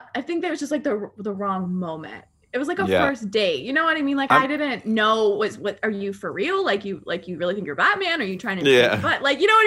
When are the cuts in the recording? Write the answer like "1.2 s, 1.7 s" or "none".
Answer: none